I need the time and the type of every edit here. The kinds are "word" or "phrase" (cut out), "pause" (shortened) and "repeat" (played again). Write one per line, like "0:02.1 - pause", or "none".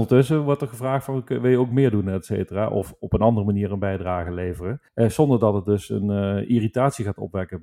0:04.9 - pause